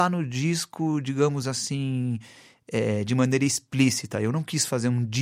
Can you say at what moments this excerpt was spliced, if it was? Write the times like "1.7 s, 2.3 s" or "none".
none